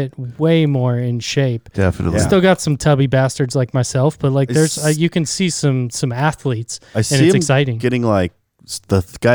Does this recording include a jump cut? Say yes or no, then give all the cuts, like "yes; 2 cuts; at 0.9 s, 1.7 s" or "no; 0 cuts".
no; 0 cuts